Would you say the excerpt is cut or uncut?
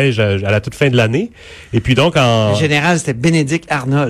uncut